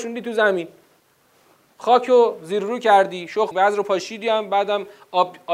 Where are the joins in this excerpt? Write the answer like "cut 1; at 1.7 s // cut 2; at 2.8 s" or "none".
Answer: cut 1; at 3.5 s

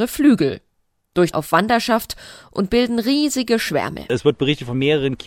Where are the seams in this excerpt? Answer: cut 1; at 1.3 s

